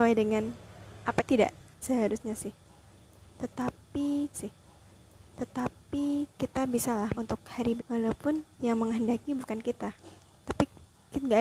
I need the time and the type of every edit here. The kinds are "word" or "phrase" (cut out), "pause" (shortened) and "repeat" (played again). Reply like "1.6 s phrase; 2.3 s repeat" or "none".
1.2 s phrase; 1.8 s word; 4.3 s repeat; 7.1 s word; 7.8 s word; 8.5 s pause